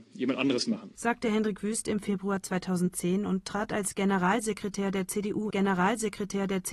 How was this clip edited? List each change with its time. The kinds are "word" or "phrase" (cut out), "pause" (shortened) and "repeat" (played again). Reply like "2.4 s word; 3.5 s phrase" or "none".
5.5 s repeat